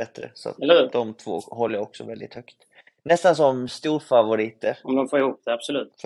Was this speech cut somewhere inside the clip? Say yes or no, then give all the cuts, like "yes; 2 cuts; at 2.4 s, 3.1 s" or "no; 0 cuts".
no; 0 cuts